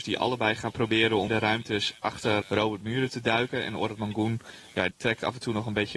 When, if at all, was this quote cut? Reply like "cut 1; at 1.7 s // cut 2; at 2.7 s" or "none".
cut 1; at 1.3 s // cut 2; at 2.4 s // cut 3; at 4.9 s

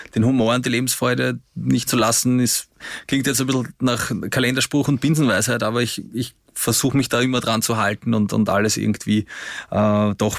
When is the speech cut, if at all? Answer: cut 1; at 1.9 s

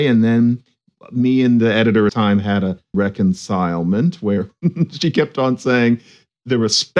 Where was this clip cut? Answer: cut 1; at 2.1 s // cut 2; at 2.9 s

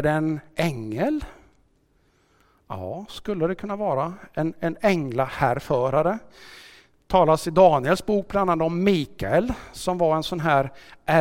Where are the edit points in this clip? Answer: none

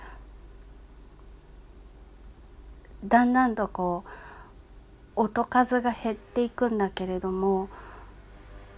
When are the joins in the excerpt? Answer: cut 1; at 5.1 s

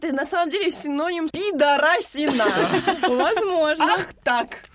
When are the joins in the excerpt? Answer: cut 1; at 1.3 s

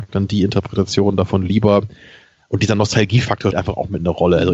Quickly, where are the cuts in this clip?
cut 1; at 3.5 s

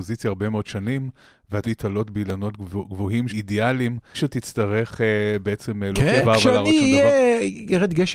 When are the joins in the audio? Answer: cut 1; at 1.6 s // cut 2; at 3.3 s // cut 3; at 4.1 s // cut 4; at 6.2 s

